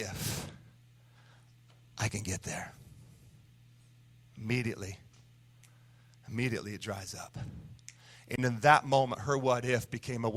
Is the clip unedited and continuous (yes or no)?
yes